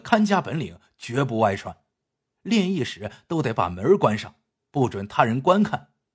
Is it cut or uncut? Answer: uncut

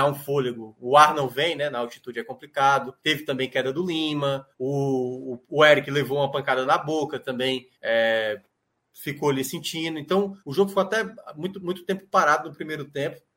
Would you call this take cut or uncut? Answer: cut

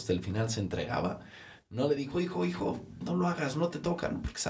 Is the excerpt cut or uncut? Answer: uncut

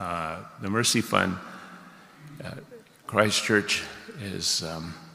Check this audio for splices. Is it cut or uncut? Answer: uncut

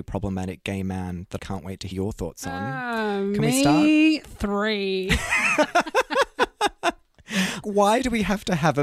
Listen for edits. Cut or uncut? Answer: cut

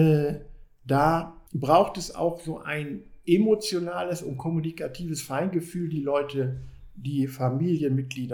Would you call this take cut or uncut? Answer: cut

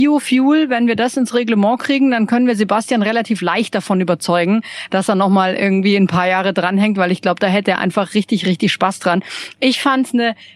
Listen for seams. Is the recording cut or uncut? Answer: uncut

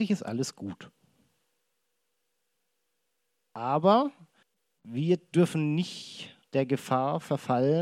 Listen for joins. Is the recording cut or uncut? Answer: cut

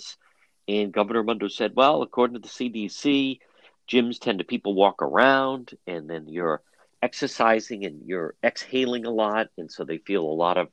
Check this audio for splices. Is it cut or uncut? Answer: uncut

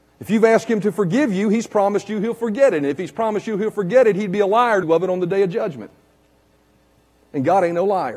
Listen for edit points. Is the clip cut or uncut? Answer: cut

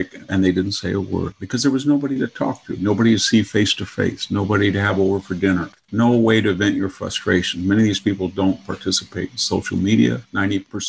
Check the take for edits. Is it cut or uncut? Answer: uncut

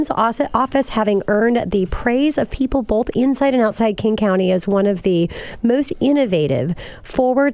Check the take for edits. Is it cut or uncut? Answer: uncut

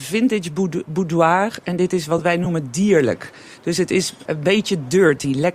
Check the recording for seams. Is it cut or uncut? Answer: cut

